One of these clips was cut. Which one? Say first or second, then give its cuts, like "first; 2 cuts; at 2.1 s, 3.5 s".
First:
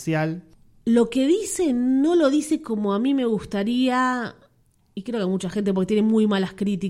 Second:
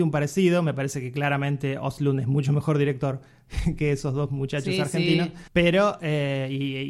second; 1 cut; at 5.5 s